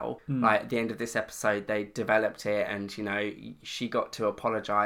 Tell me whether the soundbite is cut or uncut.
uncut